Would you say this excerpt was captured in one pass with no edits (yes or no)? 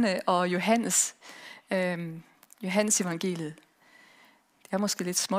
yes